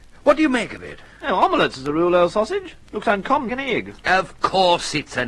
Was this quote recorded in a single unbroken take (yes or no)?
no